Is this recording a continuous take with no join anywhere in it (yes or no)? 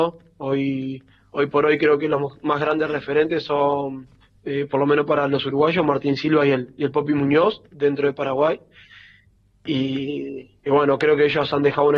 yes